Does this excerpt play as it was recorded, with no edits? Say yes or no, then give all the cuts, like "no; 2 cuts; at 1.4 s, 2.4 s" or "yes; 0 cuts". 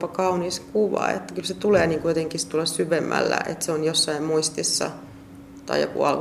yes; 0 cuts